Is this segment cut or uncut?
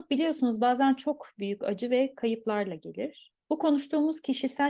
cut